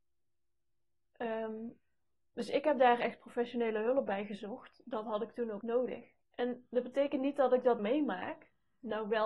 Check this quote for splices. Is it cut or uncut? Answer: cut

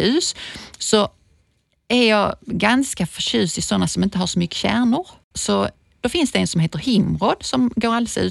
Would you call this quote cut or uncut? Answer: uncut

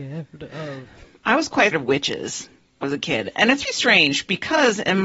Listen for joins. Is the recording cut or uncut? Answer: cut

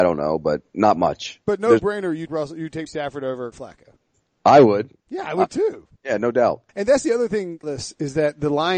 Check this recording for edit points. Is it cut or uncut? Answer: cut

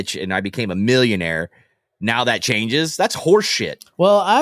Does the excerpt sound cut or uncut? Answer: uncut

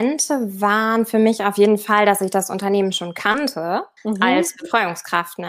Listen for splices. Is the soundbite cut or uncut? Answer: cut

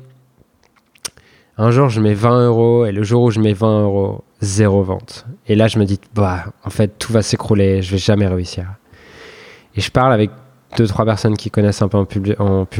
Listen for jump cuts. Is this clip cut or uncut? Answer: uncut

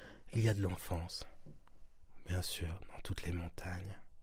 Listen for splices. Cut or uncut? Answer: uncut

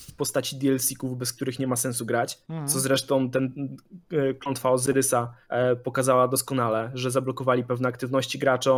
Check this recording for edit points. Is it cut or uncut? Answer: cut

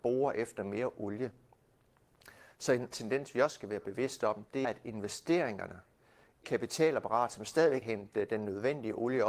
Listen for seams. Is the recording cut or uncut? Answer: cut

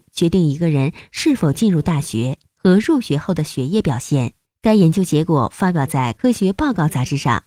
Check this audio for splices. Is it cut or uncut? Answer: cut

